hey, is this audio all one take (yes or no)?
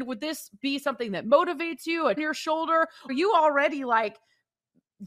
no